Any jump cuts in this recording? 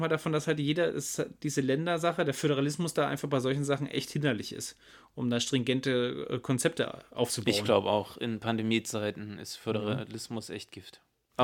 no; 0 cuts

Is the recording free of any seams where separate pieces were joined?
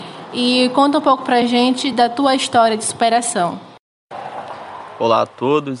yes; 0 cuts

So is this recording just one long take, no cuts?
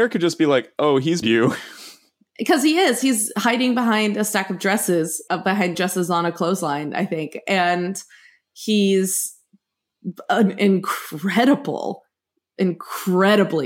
no; 3 cuts; at 1.2 s, 5.3 s, 5.7 s

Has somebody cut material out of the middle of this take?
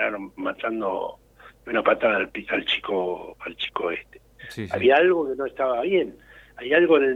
no; 0 cuts

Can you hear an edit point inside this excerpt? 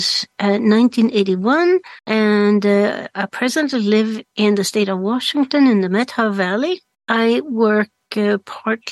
yes; 2 cuts; at 2.0 s, 6.9 s

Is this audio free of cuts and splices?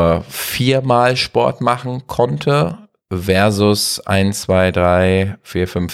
yes; 0 cuts

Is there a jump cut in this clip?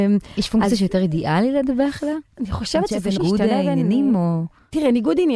yes; 1 cut; at 3.2 s

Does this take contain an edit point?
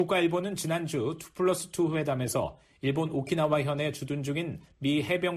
no; 0 cuts

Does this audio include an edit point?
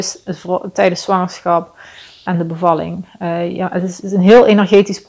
yes; 2 cuts; at 2.3 s, 4.0 s

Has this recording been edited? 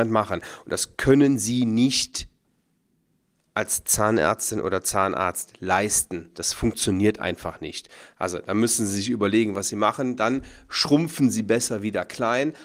no; 0 cuts

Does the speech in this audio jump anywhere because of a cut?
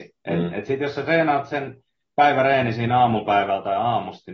no; 0 cuts

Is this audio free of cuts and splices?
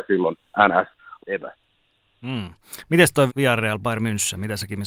no; 2 cuts; at 1.2 s, 3.3 s

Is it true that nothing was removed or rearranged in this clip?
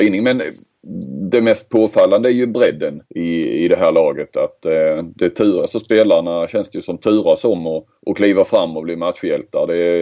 no; 2 cuts; at 3.1 s, 8.0 s

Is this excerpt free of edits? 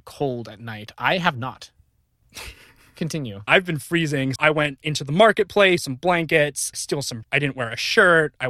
no; 6 cuts; at 3.5 s, 4.4 s, 4.8 s, 5.8 s, 6.7 s, 7.2 s

